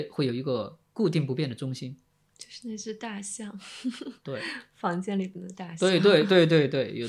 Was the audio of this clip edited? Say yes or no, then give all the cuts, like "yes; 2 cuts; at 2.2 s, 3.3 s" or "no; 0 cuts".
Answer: no; 0 cuts